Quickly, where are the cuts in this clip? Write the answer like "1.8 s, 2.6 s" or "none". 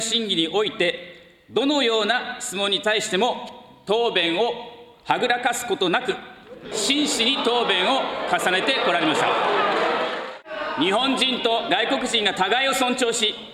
6.7 s